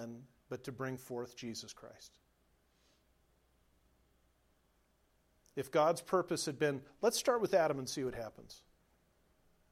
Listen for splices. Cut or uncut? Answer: uncut